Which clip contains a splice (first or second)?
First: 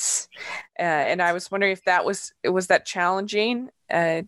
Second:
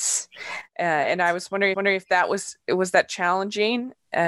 second